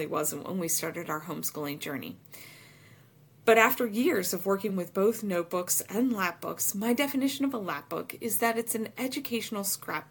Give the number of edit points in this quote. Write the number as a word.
zero